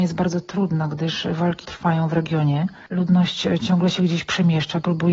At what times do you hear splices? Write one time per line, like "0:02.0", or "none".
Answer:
0:01.6